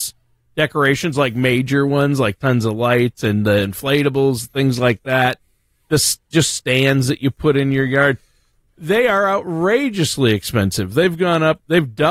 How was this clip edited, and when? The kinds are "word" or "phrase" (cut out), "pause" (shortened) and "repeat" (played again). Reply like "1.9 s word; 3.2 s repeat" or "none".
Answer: none